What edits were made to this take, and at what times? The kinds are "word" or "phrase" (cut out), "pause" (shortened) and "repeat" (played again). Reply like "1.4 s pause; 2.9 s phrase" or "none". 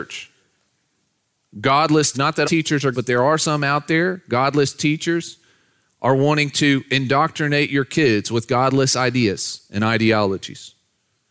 2.1 s word; 2.4 s word; 2.9 s word